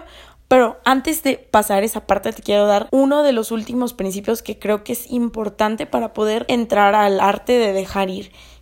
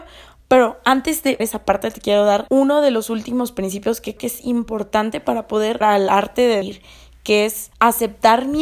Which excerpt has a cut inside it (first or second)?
second